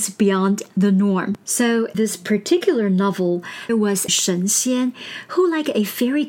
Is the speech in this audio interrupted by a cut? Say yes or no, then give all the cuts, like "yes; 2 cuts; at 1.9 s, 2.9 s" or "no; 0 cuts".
yes; 3 cuts; at 1.9 s, 3.7 s, 4.1 s